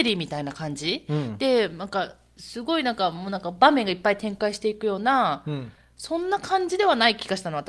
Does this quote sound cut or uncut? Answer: uncut